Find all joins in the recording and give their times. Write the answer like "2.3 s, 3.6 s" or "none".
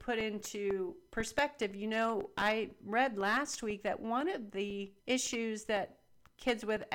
5.0 s